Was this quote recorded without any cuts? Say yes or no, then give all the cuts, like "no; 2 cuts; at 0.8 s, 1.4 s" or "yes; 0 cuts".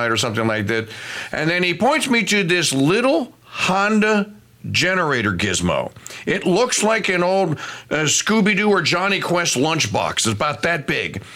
yes; 0 cuts